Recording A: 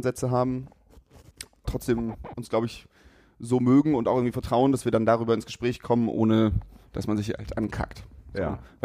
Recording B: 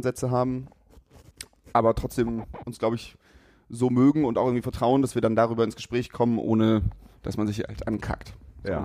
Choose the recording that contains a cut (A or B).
A